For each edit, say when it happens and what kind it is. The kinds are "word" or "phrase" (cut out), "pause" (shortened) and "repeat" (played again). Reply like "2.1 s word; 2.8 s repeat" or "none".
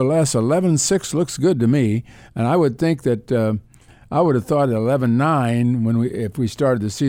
none